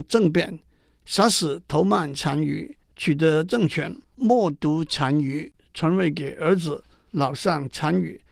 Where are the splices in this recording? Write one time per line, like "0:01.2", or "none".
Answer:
0:02.8
0:04.0